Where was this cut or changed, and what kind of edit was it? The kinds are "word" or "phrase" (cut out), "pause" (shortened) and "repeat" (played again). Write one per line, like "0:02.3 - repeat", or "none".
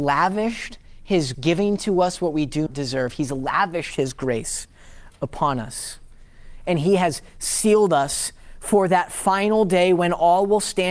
0:01.3 - word
0:02.7 - word